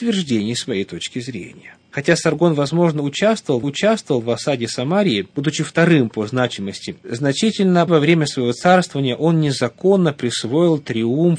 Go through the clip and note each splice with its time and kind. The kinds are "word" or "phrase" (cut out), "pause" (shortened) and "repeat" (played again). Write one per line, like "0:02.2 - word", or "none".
0:03.6 - repeat
0:07.0 - word
0:07.9 - word